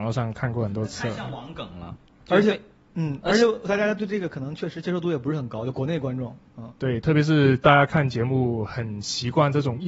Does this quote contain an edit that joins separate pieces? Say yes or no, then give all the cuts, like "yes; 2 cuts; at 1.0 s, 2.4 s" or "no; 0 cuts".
no; 0 cuts